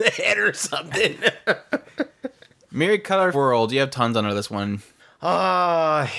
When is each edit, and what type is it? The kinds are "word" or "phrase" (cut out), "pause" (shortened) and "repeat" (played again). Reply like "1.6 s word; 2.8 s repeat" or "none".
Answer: 3.3 s word; 5.0 s pause